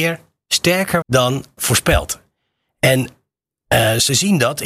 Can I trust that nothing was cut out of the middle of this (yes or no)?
no